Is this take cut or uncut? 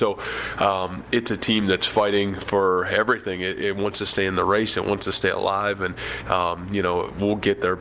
uncut